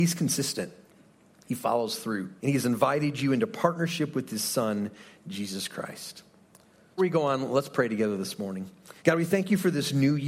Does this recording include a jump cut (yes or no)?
yes